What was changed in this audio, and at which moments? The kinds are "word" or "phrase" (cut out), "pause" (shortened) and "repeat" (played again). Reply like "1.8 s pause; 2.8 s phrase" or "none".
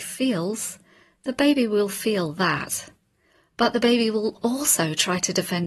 none